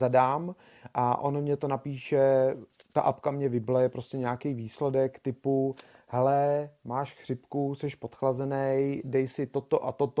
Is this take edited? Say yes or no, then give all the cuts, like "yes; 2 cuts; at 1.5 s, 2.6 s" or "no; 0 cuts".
no; 0 cuts